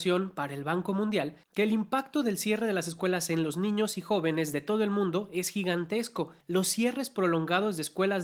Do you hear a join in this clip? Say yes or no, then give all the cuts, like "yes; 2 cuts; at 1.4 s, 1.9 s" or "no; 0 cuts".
yes; 2 cuts; at 1.4 s, 6.4 s